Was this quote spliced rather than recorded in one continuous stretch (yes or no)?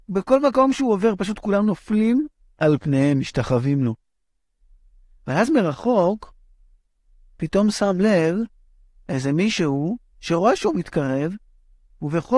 no